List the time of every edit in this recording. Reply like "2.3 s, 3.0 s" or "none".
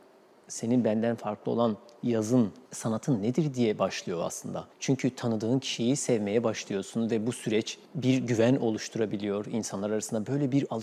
2.7 s, 4.7 s, 7.9 s